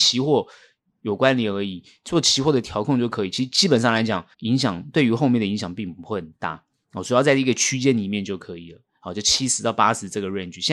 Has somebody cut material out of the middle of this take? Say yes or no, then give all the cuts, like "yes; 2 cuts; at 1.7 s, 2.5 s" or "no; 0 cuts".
yes; 1 cut; at 4.3 s